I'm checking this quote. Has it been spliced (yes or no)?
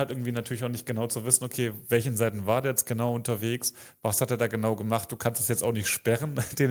no